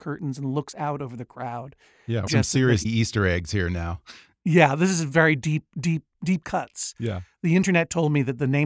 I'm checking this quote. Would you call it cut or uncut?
cut